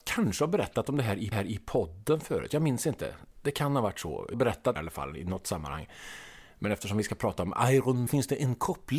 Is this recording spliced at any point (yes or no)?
yes